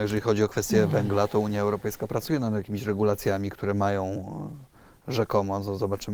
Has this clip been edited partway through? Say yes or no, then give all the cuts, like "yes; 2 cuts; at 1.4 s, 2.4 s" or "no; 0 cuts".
no; 0 cuts